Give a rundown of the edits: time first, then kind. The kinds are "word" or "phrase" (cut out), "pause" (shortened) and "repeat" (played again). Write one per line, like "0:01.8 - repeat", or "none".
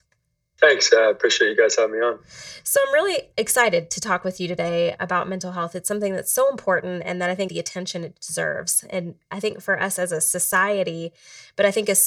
0:07.5 - phrase

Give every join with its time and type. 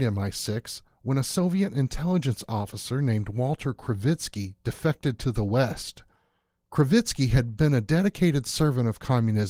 none

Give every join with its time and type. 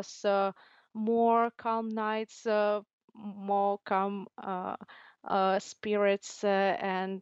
none

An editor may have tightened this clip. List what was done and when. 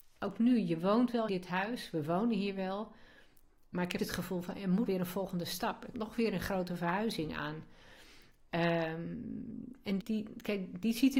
0:01.3 - word
0:04.0 - word
0:04.9 - word
0:05.9 - word
0:10.0 - word

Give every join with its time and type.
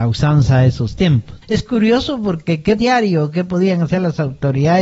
0:01.4 - pause
0:02.8 - phrase

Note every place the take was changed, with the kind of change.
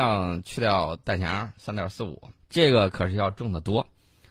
0:02.4 - pause

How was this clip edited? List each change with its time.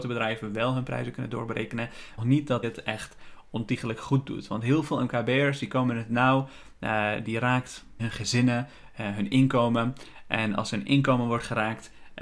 0:02.2 - phrase
0:02.6 - phrase
0:08.0 - word

